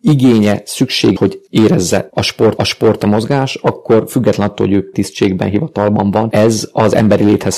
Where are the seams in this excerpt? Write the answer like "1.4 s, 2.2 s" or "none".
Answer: 1.2 s, 1.5 s, 2.1 s, 2.6 s, 4.9 s